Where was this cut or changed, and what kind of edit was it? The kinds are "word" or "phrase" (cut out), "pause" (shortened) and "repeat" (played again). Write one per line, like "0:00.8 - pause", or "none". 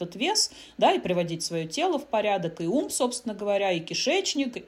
none

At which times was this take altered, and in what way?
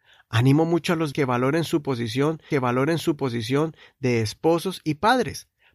0:01.1 - word
0:02.5 - repeat

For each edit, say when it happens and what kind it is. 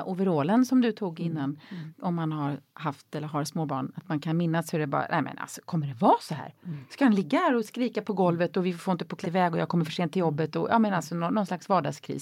0:09.2 - phrase

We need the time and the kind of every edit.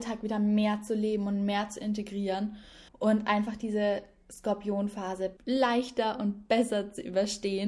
0:02.9 - pause
0:05.4 - pause

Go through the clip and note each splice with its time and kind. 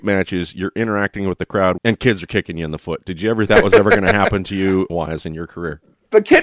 0:01.8 - word
0:03.5 - word
0:04.9 - word

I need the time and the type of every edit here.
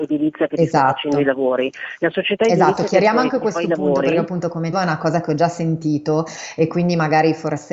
0:04.7 - phrase

